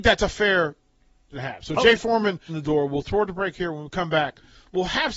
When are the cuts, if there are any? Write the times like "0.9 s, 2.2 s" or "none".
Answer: 1.3 s, 2.5 s